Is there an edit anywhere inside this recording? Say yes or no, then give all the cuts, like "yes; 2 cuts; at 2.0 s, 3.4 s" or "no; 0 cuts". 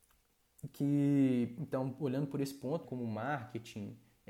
yes; 1 cut; at 2.8 s